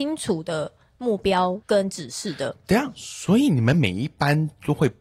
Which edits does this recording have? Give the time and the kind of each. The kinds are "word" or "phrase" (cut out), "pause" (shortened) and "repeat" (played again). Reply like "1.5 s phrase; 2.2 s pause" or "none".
1.6 s pause

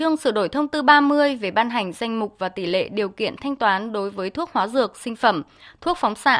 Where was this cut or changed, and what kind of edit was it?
none

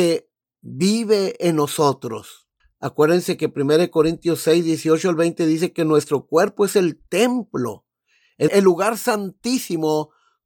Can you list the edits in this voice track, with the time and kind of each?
2.6 s pause; 8.5 s word

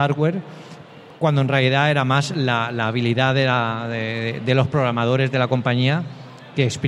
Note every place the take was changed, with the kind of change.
none

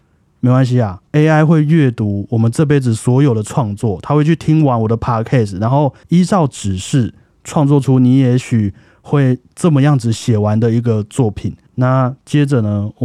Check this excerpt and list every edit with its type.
1.1 s pause; 6.0 s pause; 11.7 s pause

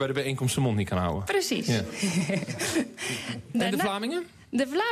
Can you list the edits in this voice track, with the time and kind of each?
3.5 s word

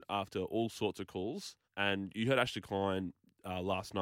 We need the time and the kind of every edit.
1.6 s pause

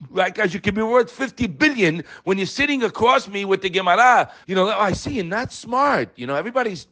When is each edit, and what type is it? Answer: 4.4 s word; 5.5 s word

